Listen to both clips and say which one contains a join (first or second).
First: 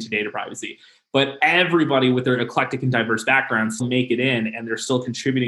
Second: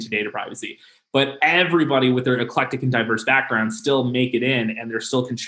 first